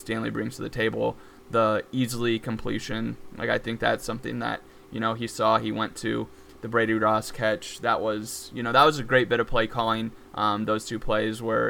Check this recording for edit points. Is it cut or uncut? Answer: uncut